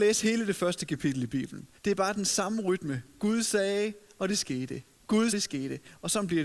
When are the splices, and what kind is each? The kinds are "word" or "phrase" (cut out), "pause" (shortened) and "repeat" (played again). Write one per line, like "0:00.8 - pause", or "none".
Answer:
0:01.8 - pause
0:05.3 - phrase